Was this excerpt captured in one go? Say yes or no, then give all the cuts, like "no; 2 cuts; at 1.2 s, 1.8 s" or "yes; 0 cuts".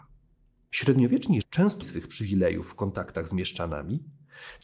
no; 2 cuts; at 1.4 s, 1.8 s